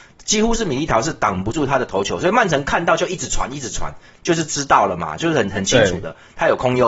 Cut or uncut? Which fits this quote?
uncut